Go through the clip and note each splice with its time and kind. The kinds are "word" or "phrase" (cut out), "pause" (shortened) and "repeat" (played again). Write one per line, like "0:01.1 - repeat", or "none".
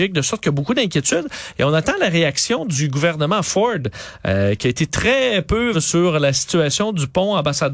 0:05.7 - word